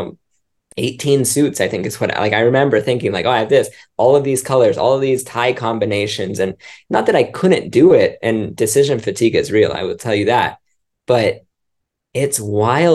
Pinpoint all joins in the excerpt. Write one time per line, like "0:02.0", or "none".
none